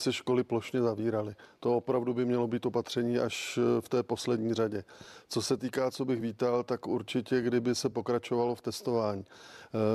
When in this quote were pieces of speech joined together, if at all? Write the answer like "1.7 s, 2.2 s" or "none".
none

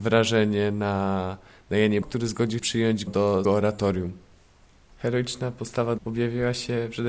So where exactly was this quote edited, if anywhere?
2.0 s, 2.6 s, 3.1 s, 3.4 s, 6.0 s

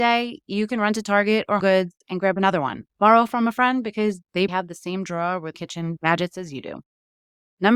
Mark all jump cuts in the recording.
1.6 s, 2.0 s, 2.9 s, 4.5 s, 5.5 s

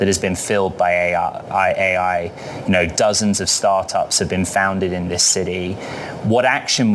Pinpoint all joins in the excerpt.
none

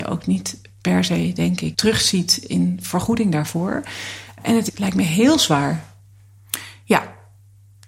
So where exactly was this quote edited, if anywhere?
1.7 s

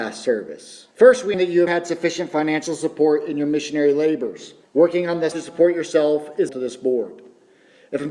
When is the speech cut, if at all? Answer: 0.9 s, 1.3 s, 1.7 s, 4.6 s, 5.3 s, 6.5 s

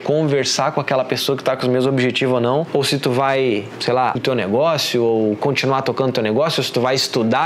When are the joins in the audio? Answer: 4.2 s

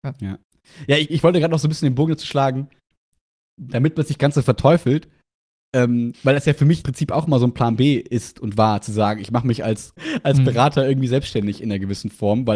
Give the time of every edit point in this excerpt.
1.1 s, 6.8 s, 10.0 s

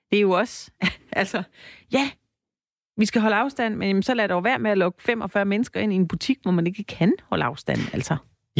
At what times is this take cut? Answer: none

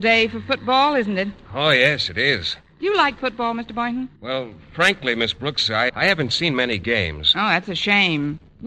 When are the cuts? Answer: 4.1 s, 5.9 s

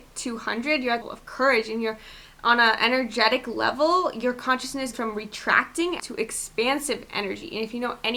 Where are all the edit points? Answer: 1.0 s, 4.9 s, 6.0 s

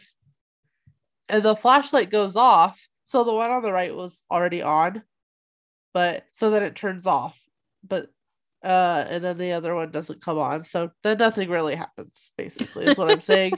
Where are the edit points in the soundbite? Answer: 3.0 s, 6.3 s

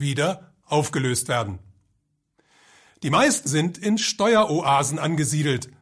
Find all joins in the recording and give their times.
3.5 s

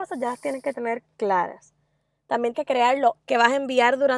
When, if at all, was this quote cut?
2.5 s, 3.2 s

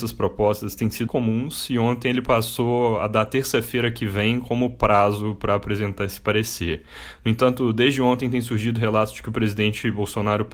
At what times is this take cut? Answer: 1.1 s

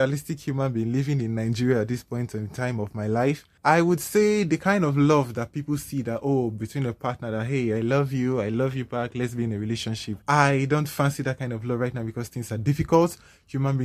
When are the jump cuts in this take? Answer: 3.6 s, 10.2 s

